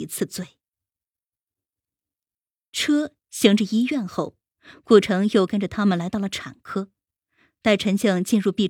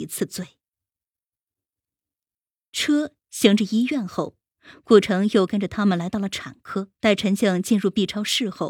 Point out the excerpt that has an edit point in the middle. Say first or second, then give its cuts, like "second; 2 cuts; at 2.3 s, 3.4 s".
second; 1 cut; at 6.9 s